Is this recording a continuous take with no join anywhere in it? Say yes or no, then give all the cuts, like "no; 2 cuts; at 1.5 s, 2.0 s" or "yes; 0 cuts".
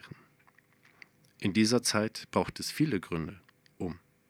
yes; 0 cuts